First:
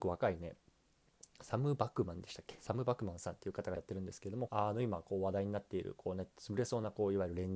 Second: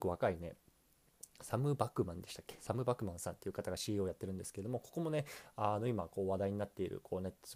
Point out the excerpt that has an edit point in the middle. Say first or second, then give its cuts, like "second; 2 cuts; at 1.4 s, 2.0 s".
first; 2 cuts; at 3.8 s, 4.5 s